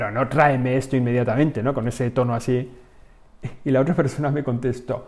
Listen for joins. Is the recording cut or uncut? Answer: uncut